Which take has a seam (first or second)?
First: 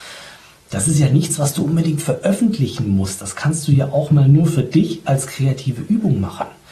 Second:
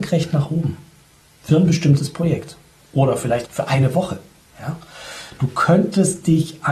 second